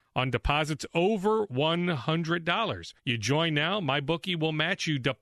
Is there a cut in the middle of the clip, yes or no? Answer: yes